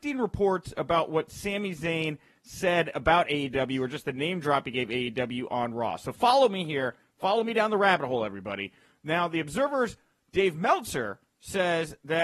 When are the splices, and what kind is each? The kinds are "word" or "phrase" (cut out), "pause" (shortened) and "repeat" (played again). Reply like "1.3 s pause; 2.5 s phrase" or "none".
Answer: none